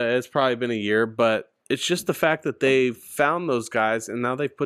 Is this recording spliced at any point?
yes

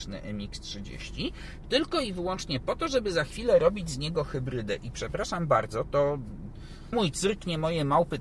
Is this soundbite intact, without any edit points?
no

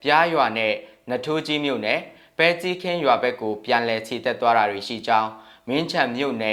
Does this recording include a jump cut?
no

